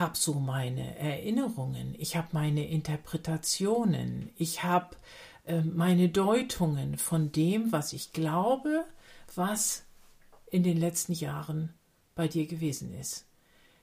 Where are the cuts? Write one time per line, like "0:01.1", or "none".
none